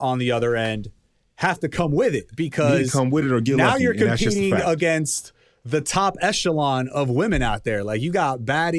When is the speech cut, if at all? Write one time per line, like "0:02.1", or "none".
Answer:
none